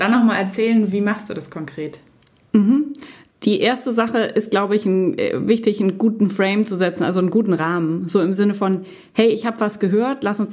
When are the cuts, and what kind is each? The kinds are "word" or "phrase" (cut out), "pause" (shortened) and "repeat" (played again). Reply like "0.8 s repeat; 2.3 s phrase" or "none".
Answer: 3.3 s pause